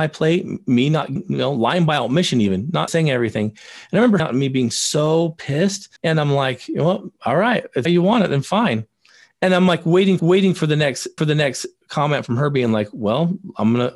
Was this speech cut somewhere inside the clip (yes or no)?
yes